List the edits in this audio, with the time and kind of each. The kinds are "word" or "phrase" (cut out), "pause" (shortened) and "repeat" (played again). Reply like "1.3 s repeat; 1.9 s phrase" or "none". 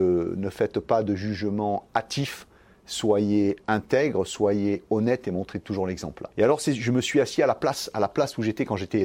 6.3 s pause